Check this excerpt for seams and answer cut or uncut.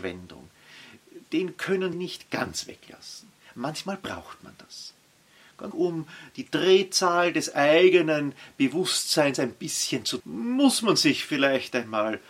cut